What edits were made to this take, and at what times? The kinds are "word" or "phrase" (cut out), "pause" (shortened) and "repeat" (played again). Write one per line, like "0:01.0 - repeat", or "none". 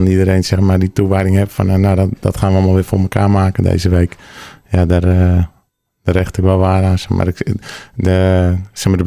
none

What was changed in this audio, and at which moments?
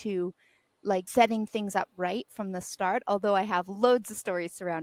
0:01.1 - word

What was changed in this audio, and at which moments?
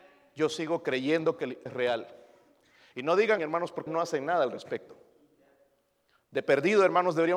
0:01.7 - word
0:03.4 - word
0:03.9 - word

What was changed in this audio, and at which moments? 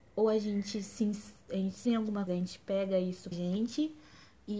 0:01.4 - pause
0:01.8 - word
0:02.3 - word
0:03.3 - word

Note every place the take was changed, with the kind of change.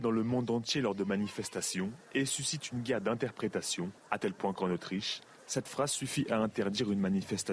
0:04.0 - pause

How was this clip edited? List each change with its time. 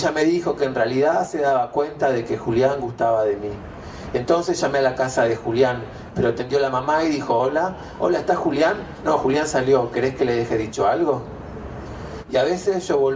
none

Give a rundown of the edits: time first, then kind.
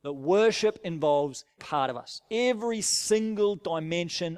0:01.6 - word

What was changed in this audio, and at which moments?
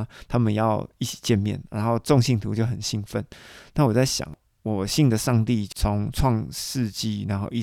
none

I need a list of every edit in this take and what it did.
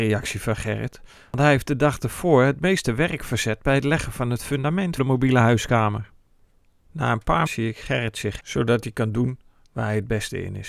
0:05.0 - word
0:07.5 - word
0:08.4 - word

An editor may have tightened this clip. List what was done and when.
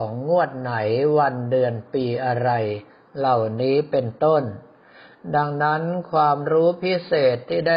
none

